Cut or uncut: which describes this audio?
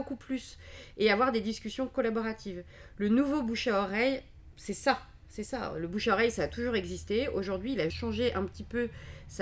cut